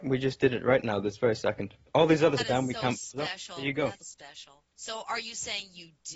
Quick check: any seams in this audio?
yes; 3 cuts; at 2.4 s, 4.0 s, 4.7 s

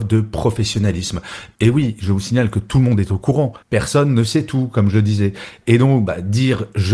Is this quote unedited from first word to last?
no; 1 cut; at 3.6 s

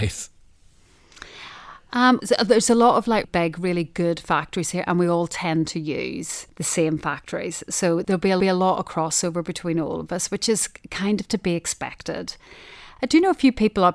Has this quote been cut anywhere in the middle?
yes; 2 cuts; at 3.2 s, 8.4 s

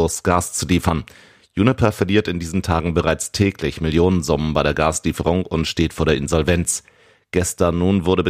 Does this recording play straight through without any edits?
yes; 0 cuts

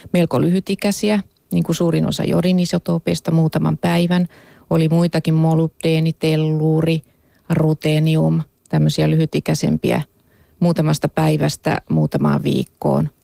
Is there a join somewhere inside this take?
no; 0 cuts

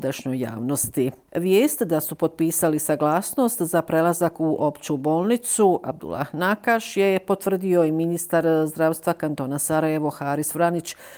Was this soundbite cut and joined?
no; 0 cuts

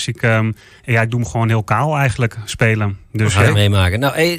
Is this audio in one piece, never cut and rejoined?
yes; 0 cuts

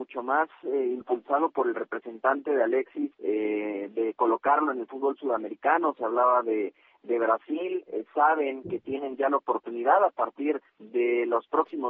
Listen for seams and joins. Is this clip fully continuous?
no; 2 cuts; at 3.1 s, 10.7 s

